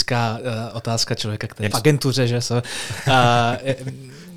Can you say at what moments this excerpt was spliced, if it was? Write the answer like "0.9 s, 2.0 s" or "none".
1.7 s